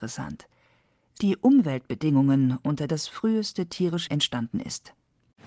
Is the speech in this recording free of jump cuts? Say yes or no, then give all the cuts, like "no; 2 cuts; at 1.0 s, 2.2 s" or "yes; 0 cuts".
no; 3 cuts; at 1.2 s, 2.9 s, 4.1 s